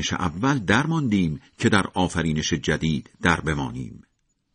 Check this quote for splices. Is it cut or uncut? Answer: uncut